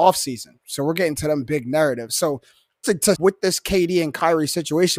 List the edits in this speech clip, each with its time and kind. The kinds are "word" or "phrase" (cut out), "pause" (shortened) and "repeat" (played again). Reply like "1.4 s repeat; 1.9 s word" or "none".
2.8 s word; 3.1 s phrase

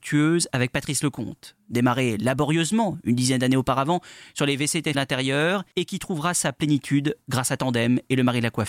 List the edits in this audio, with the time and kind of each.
4.9 s word

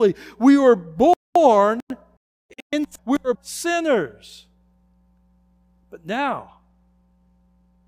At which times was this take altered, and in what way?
3.0 s word; 3.3 s word

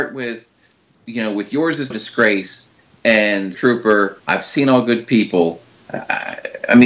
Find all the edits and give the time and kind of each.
1.9 s word; 3.5 s word; 4.2 s pause

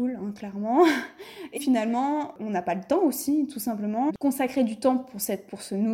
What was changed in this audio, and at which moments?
1.6 s word; 4.1 s word

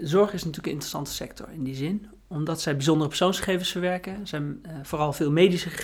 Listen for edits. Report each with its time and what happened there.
none

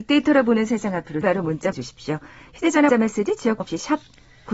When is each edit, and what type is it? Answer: 1.2 s word; 1.7 s word; 2.9 s word; 3.6 s word

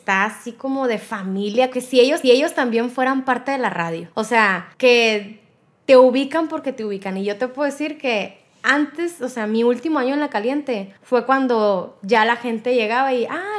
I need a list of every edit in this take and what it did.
1.7 s word; 2.2 s repeat; 4.1 s pause; 4.7 s pause; 11.0 s pause

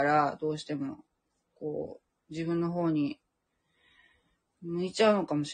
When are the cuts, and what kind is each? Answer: none

